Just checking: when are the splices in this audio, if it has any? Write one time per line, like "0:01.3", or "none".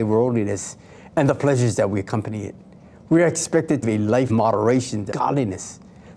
0:03.8
0:04.3
0:05.1